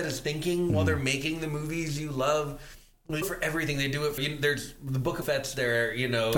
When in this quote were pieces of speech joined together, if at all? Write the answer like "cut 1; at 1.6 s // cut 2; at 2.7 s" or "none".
cut 1; at 3.2 s // cut 2; at 4.2 s // cut 3; at 5.2 s

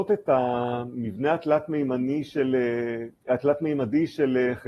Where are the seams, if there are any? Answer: cut 1; at 3.2 s

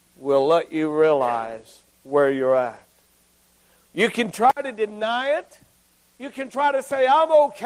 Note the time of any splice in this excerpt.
none

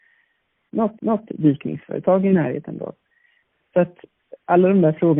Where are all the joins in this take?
cut 1; at 1.0 s

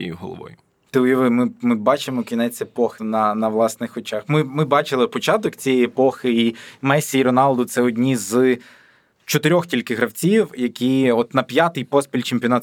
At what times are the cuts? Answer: cut 1; at 3.0 s

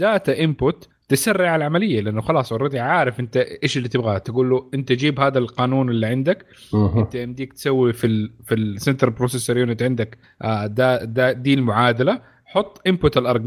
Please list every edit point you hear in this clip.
none

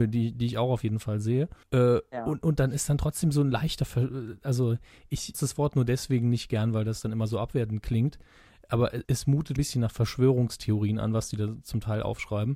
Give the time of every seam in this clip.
cut 1; at 1.6 s // cut 2; at 5.3 s // cut 3; at 9.0 s // cut 4; at 9.6 s

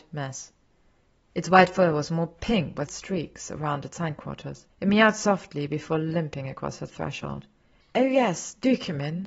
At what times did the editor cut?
cut 1; at 2.9 s // cut 2; at 4.7 s

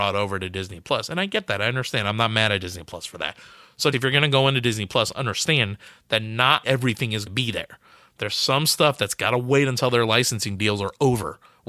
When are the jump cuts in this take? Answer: cut 1; at 3.9 s // cut 2; at 6.6 s // cut 3; at 7.3 s

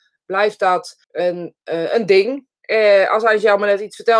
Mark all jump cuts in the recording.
cut 1; at 1.0 s

